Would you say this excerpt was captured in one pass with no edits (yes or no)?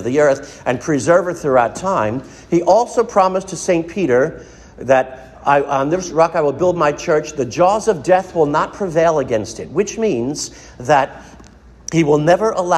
yes